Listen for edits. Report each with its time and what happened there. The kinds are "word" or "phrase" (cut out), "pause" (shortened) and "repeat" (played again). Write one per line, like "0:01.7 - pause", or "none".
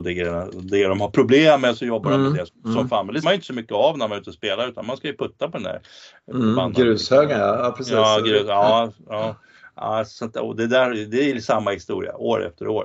0:02.5 - word
0:03.2 - word